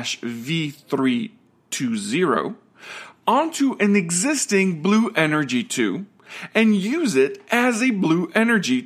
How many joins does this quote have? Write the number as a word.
zero